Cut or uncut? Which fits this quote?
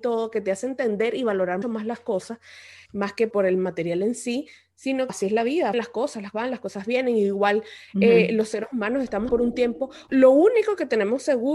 cut